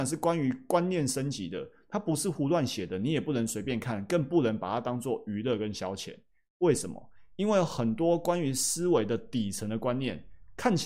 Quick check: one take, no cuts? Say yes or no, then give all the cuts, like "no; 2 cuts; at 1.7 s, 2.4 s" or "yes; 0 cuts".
yes; 0 cuts